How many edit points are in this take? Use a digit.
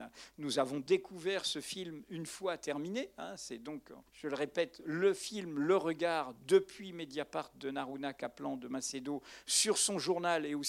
1